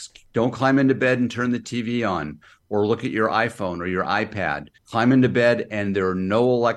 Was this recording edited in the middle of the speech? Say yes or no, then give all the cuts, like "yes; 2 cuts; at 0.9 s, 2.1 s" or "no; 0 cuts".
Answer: yes; 1 cut; at 4.8 s